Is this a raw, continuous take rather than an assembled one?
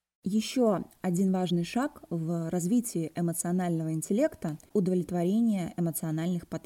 yes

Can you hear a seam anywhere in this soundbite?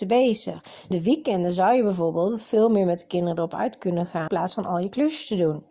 yes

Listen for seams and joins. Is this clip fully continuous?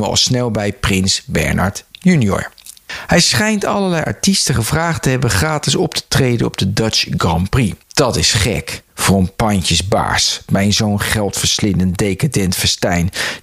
no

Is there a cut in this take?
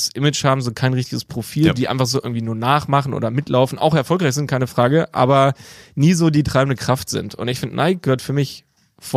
no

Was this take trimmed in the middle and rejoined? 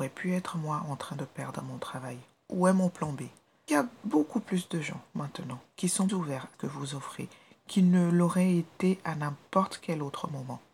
yes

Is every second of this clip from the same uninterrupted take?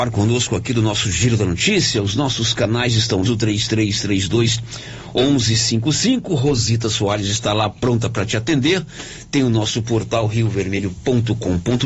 no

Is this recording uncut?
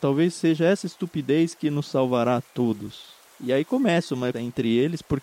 no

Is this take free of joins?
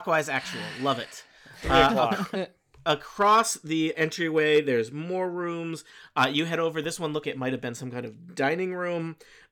no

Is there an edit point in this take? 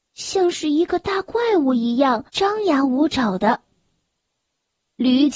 yes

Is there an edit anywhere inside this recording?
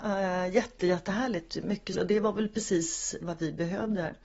yes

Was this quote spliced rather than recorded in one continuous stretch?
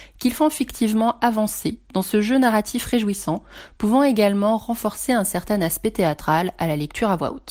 no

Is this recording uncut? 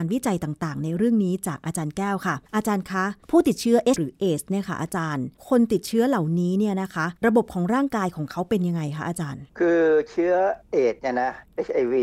no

